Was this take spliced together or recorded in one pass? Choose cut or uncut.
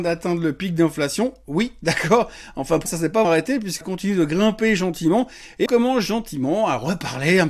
cut